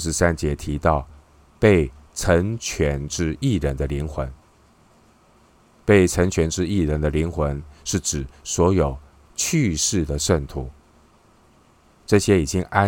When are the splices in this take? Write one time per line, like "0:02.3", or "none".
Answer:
none